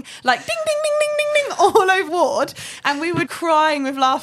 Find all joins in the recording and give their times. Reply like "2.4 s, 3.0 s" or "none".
2.1 s, 3.3 s